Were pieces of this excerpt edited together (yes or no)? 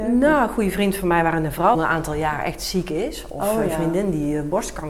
yes